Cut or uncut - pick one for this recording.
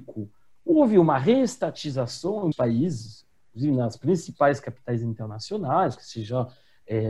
cut